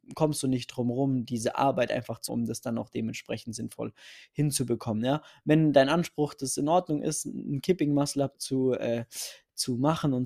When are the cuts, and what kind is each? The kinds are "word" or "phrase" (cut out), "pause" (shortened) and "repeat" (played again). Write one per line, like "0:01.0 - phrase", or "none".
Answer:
0:02.3 - word
0:08.3 - word